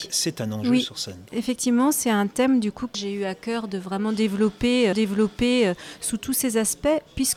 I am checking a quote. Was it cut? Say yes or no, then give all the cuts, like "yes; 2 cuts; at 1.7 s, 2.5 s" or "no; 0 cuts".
yes; 2 cuts; at 2.9 s, 4.9 s